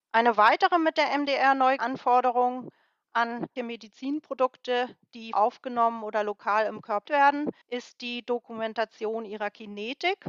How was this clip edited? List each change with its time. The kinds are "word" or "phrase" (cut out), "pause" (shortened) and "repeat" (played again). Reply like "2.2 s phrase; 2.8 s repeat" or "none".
1.8 s word; 3.6 s word; 5.3 s phrase; 7.1 s word; 7.6 s pause